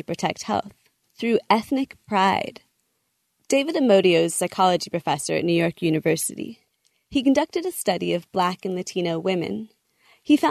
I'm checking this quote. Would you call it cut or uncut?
uncut